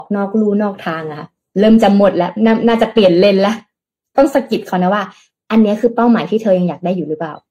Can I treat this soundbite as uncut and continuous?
yes; 0 cuts

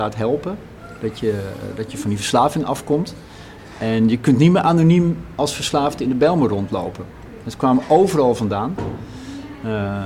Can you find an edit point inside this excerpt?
no; 0 cuts

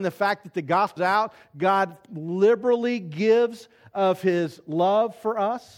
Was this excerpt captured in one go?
no; 1 cut; at 1.0 s

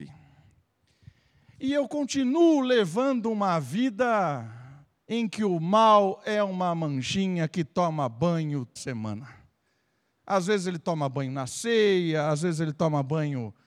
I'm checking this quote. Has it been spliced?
yes; 2 cuts; at 5.0 s, 8.8 s

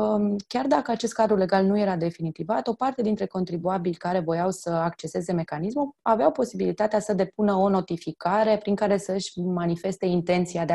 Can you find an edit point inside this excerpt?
no; 0 cuts

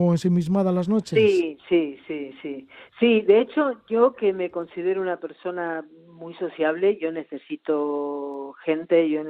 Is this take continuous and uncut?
yes; 0 cuts

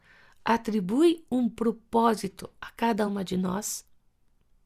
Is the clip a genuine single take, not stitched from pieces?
yes; 0 cuts

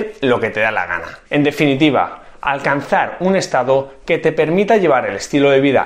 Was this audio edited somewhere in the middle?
yes; 1 cut; at 1.3 s

